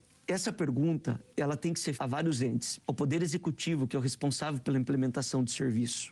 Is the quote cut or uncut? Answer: cut